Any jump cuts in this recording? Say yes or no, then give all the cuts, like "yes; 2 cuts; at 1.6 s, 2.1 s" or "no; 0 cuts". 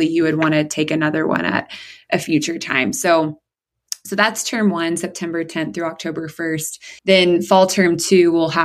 yes; 1 cut; at 7.0 s